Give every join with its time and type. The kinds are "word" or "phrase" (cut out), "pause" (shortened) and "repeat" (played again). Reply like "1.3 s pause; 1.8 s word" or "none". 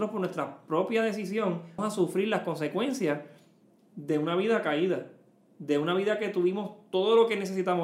1.8 s word